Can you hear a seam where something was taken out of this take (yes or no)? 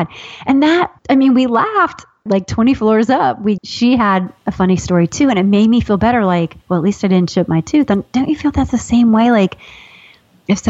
yes